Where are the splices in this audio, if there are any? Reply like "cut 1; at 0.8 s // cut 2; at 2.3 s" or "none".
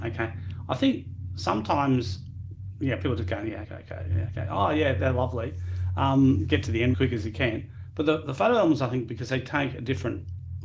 cut 1; at 3.6 s // cut 2; at 6.9 s